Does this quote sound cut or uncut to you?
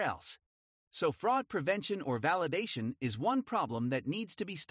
uncut